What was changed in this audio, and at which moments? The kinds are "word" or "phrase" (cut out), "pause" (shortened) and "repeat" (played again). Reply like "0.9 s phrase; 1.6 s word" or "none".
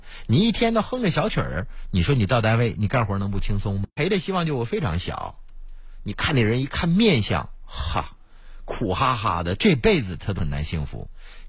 none